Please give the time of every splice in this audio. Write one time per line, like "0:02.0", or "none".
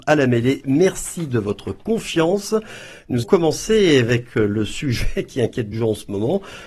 0:03.2
0:05.7